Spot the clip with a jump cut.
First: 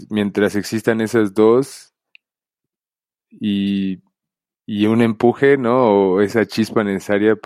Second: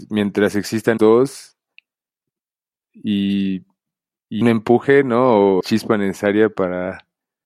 second; 3 cuts; at 1.0 s, 4.4 s, 5.6 s

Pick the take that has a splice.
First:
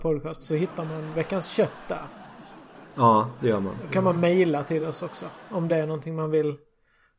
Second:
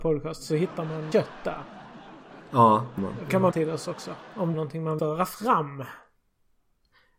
second; 5 cuts; at 1.1 s, 3.0 s, 3.5 s, 4.5 s, 5.0 s

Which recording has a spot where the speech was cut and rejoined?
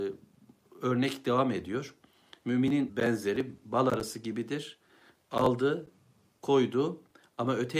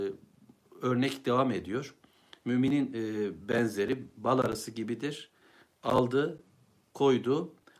first; 1 cut; at 2.9 s

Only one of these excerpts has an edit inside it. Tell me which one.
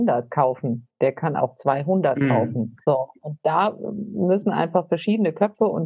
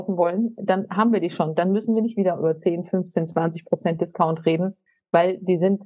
first; 1 cut; at 2.8 s

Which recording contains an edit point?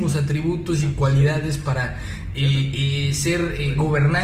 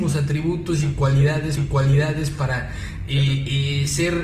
second; 1 cut; at 1.6 s

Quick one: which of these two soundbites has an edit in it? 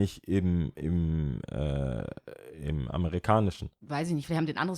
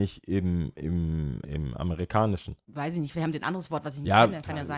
second; 1 cut; at 1.4 s

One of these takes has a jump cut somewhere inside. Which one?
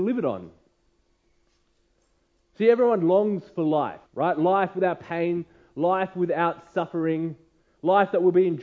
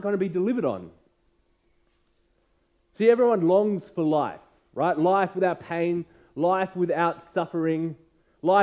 first; 1 cut; at 4.1 s

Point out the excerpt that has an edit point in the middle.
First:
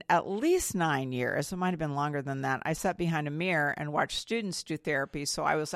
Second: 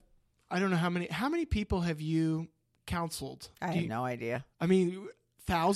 second; 2 cuts; at 3.5 s, 4.5 s

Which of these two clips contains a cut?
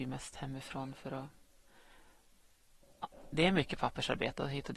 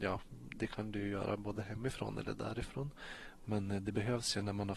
first; 1 cut; at 3.3 s

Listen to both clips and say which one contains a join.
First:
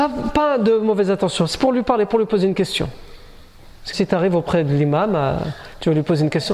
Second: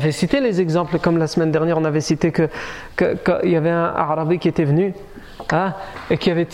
first; 1 cut; at 3.9 s

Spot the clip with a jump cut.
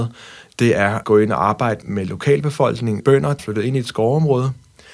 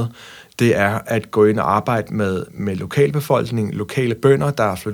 first; 4 cuts; at 1.0 s, 1.8 s, 3.0 s, 3.4 s

